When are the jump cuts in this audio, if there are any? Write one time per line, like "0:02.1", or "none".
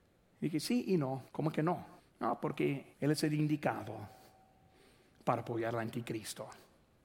0:01.3
0:02.0
0:02.9